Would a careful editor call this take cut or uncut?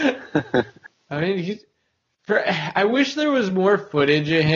uncut